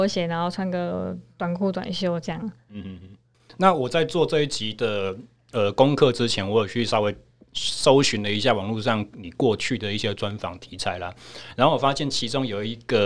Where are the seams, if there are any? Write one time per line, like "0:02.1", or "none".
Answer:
none